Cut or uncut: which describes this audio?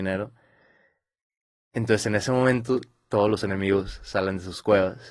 uncut